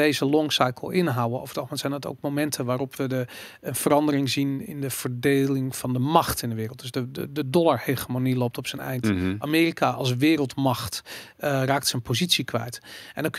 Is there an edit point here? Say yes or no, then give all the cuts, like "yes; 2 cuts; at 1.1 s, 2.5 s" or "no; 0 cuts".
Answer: no; 0 cuts